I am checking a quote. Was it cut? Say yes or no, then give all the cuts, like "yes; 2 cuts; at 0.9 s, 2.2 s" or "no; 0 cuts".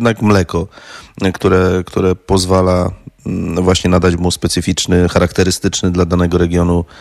no; 0 cuts